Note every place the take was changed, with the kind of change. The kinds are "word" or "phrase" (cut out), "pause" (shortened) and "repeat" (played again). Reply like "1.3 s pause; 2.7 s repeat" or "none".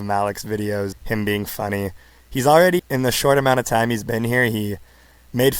0.9 s word; 2.8 s word